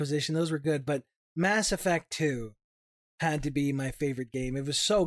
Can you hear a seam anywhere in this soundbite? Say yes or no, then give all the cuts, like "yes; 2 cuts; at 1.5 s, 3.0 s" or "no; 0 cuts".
no; 0 cuts